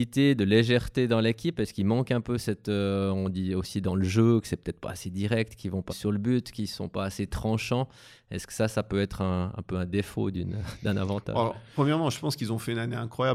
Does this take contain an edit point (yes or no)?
yes